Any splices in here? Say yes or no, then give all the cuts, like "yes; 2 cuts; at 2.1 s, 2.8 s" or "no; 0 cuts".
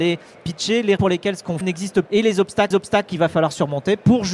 yes; 4 cuts; at 1.0 s, 1.6 s, 2.1 s, 2.7 s